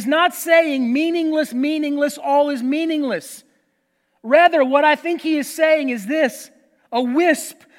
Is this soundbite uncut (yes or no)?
yes